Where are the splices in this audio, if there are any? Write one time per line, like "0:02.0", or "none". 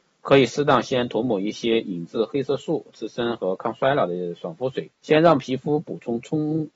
0:05.0